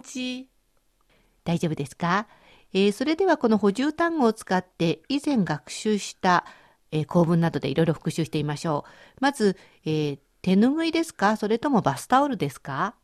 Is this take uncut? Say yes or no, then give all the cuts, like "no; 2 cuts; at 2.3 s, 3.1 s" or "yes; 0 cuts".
yes; 0 cuts